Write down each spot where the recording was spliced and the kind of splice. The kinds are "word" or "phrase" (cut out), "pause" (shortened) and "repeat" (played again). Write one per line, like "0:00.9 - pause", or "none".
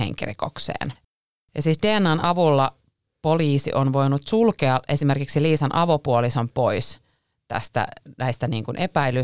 none